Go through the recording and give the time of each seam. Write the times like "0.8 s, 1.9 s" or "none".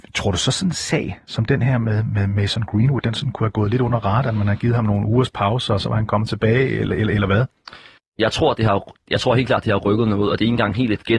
8.0 s